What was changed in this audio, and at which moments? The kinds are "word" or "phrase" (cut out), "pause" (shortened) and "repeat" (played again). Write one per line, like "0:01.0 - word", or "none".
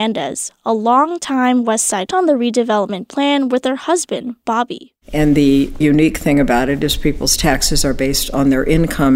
0:02.1 - phrase
0:05.8 - word